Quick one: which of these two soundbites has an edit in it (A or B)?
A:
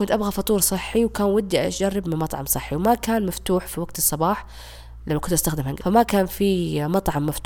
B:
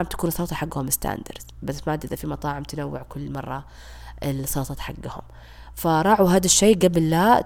A